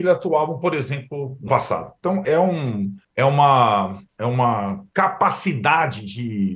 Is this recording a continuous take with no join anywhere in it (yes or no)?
no